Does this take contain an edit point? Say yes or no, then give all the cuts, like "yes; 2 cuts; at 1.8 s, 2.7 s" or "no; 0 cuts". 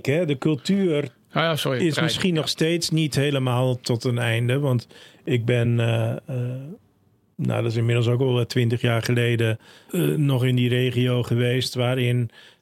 no; 0 cuts